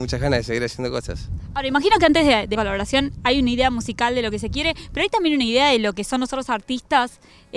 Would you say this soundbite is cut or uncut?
cut